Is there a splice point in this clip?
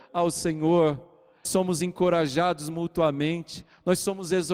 yes; 1 cut; at 1.5 s

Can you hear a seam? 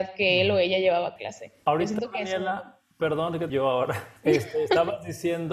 yes; 3 cuts; at 1.2 s, 3.5 s, 4.2 s

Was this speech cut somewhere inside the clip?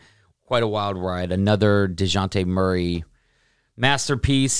no; 0 cuts

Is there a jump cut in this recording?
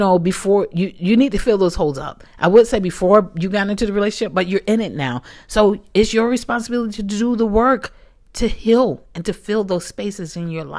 no; 0 cuts

